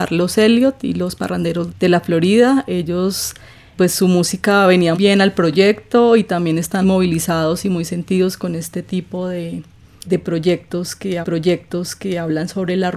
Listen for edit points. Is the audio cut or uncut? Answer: cut